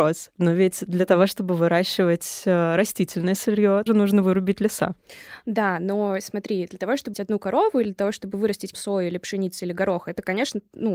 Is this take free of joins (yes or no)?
no